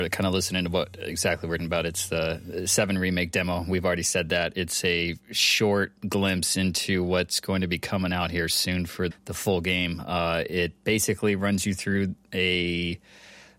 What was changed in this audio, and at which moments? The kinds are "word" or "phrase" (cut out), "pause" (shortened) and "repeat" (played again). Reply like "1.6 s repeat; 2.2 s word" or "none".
1.6 s word; 6.0 s pause; 9.1 s word